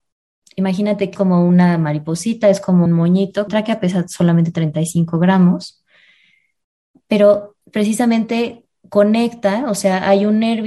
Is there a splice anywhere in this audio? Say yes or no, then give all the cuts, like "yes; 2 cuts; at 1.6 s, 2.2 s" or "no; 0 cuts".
yes; 4 cuts; at 1.1 s, 2.9 s, 3.5 s, 7.6 s